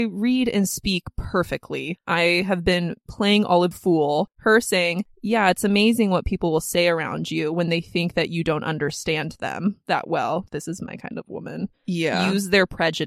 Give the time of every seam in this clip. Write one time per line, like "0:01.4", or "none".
0:03.7
0:10.5